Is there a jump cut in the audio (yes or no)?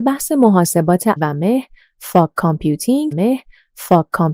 yes